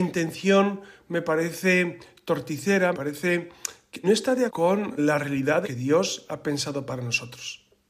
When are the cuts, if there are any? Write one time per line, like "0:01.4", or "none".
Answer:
0:02.9
0:04.0
0:04.5
0:05.0
0:05.6